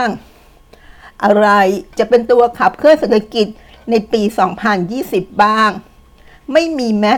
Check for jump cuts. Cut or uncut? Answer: uncut